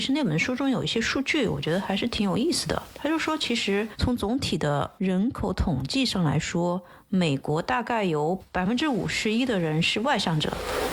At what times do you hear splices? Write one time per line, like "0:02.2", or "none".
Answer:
none